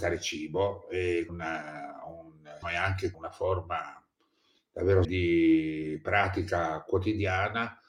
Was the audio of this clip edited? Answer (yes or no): yes